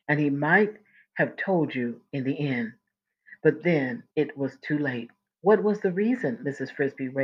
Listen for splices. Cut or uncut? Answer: cut